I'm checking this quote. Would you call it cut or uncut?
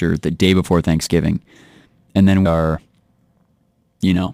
cut